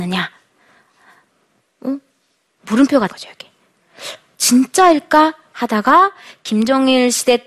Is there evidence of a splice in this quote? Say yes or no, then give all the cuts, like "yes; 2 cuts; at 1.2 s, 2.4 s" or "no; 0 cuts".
yes; 1 cut; at 3.1 s